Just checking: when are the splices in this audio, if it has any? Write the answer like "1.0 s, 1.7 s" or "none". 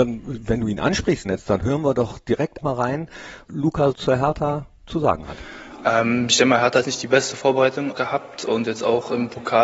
1.2 s, 2.6 s, 3.5 s, 3.9 s, 6.8 s, 7.9 s